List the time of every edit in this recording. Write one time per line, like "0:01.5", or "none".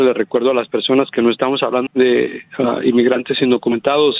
0:01.9